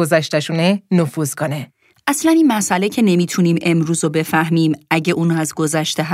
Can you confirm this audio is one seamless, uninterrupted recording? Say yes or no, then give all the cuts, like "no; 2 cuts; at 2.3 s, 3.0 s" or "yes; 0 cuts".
yes; 0 cuts